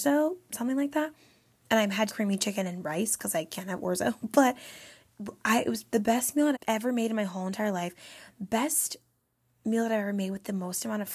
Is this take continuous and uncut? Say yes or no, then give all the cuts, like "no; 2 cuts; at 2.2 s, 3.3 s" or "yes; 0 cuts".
no; 2 cuts; at 2.1 s, 6.5 s